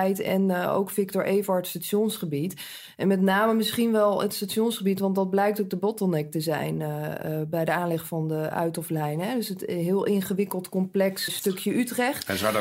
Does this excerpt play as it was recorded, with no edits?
no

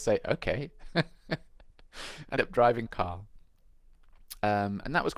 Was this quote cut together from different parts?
yes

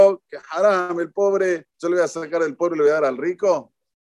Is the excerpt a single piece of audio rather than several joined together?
no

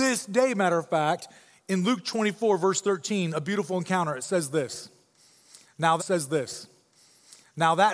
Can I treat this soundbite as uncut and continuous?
no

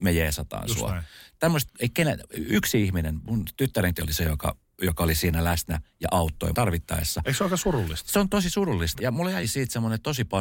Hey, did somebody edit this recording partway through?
yes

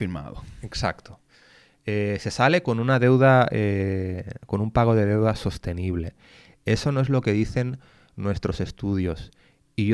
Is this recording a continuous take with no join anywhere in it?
yes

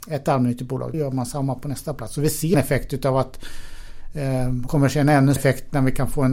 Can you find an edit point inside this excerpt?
yes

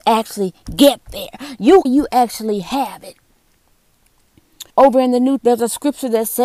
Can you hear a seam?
yes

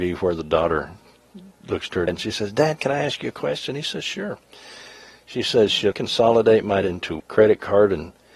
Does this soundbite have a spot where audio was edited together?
yes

